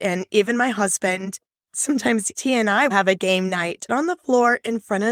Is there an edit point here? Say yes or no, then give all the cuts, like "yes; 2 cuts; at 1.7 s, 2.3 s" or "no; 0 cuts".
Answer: yes; 3 cuts; at 2.4 s, 2.9 s, 3.9 s